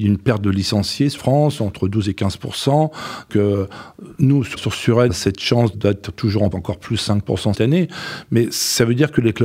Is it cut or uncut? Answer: cut